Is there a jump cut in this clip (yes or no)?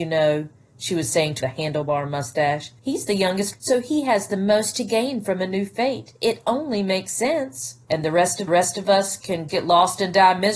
yes